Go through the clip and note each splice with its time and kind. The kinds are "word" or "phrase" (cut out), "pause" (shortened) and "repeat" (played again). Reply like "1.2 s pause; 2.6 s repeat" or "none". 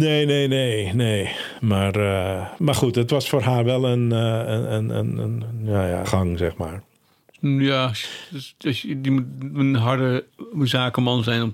6.0 s phrase